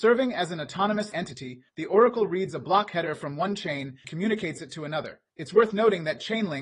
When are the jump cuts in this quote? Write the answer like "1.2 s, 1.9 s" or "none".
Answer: 1.1 s, 1.7 s, 4.0 s, 5.3 s